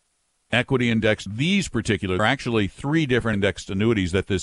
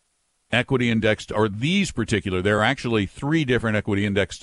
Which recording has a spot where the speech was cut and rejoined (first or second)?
first